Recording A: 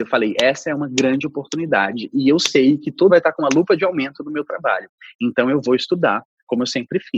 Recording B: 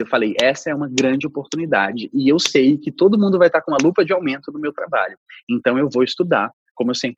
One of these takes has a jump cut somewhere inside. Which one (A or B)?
A